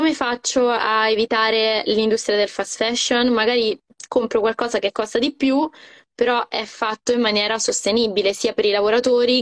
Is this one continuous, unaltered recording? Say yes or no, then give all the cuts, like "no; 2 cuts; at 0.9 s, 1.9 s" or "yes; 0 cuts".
yes; 0 cuts